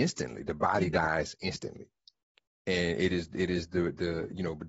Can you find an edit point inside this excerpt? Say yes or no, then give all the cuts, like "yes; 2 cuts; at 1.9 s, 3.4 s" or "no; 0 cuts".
no; 0 cuts